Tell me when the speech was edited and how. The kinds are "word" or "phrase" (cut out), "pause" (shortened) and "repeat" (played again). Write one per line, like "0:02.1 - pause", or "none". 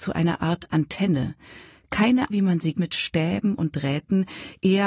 0:02.3 - word
0:02.8 - word